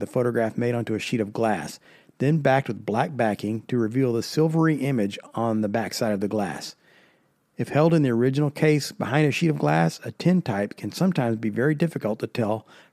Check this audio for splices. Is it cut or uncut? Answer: uncut